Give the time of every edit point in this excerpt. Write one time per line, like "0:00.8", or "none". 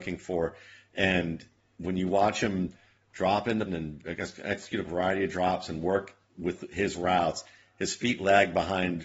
0:03.7
0:04.8